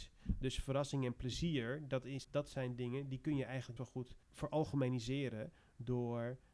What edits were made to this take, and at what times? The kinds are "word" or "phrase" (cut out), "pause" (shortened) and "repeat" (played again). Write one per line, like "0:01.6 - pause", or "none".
0:02.2 - word
0:03.8 - word
0:04.2 - pause